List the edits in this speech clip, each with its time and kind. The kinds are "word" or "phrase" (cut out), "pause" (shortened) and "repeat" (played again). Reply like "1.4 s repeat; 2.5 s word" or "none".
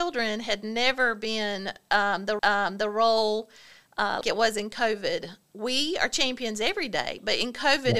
2.4 s repeat; 4.2 s word

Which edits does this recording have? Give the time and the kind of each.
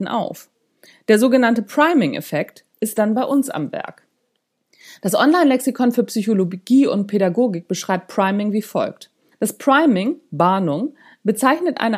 2.7 s pause; 4.5 s pause; 9.3 s pause

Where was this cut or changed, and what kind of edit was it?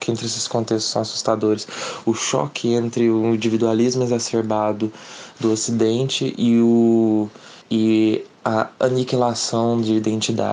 7.6 s pause

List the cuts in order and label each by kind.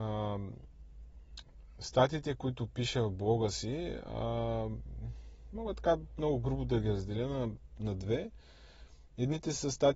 none

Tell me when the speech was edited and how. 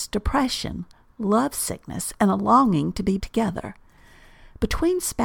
3.2 s word

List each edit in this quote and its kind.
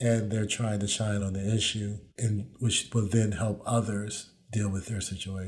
1.2 s word; 2.1 s pause

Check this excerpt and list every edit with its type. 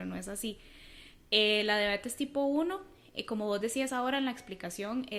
none

